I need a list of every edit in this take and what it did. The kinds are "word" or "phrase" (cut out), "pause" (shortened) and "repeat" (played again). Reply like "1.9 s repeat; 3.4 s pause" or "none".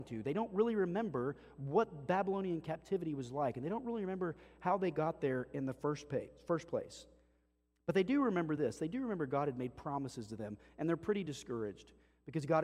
none

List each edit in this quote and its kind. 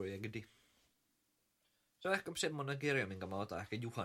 none

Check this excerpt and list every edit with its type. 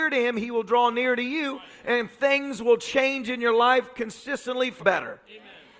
4.8 s word

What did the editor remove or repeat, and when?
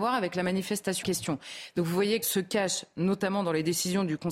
1.0 s word; 2.2 s phrase

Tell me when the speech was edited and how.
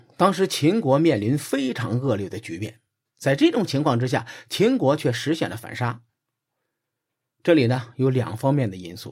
none

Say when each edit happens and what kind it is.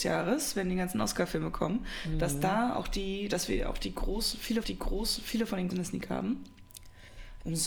4.6 s repeat; 5.7 s phrase

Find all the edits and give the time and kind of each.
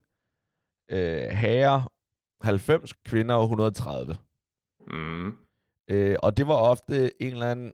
2.9 s word

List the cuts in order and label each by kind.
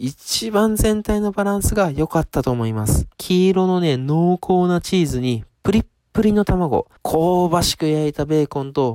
3.1 s pause; 7.0 s pause

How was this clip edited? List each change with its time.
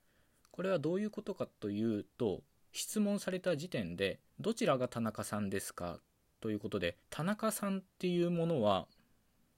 4.3 s pause; 7.0 s pause; 7.9 s pause

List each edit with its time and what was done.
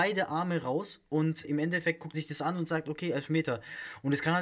1.4 s word; 2.1 s word

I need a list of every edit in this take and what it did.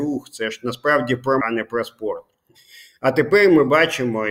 1.4 s word

